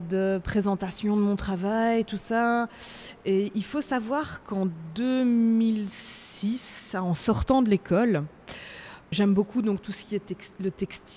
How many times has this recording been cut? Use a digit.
1